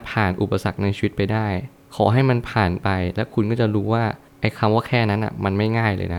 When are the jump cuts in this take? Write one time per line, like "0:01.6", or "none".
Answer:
none

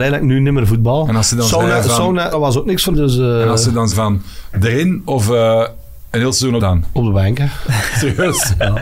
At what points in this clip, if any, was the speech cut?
0:02.3
0:02.9
0:03.9
0:06.6

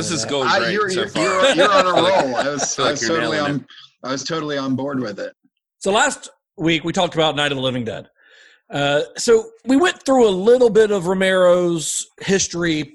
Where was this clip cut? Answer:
0:09.6

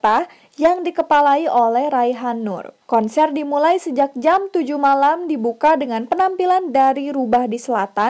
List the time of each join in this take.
0:02.8

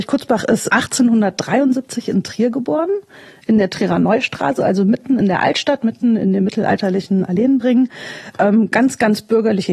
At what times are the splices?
none

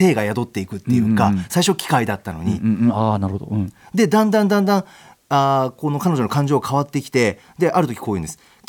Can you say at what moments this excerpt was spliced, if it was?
none

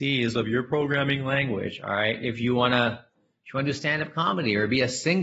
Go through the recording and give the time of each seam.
none

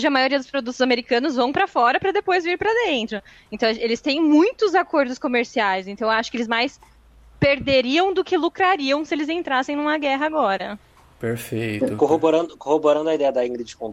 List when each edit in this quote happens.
none

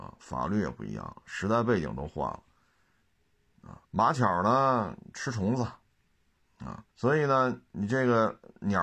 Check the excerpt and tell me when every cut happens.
0:03.8
0:06.9

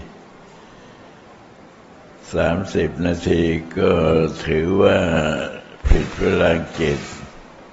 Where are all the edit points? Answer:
0:05.8

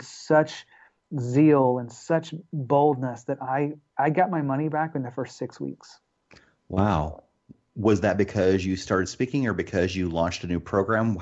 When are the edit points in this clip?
none

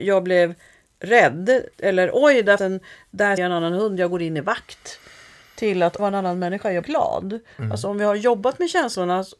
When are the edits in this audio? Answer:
0:01.7
0:02.6
0:03.4
0:06.0
0:06.8

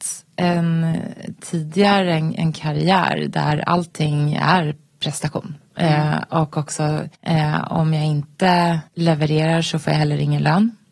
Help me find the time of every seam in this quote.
0:07.1
0:08.9

